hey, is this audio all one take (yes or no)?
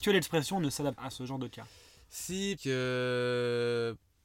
no